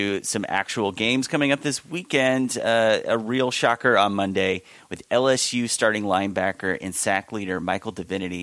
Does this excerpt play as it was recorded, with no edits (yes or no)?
yes